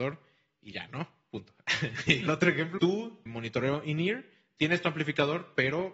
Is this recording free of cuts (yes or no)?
no